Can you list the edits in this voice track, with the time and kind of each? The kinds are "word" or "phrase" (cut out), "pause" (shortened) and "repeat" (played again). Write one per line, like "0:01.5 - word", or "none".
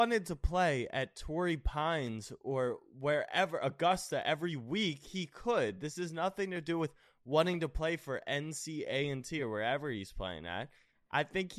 none